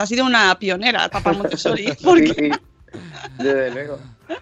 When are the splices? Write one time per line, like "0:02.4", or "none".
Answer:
0:01.1
0:02.4